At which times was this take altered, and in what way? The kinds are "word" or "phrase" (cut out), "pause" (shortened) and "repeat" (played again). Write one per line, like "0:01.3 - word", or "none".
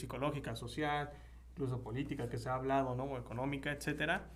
none